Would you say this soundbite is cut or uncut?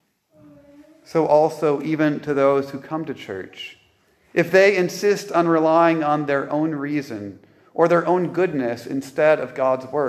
uncut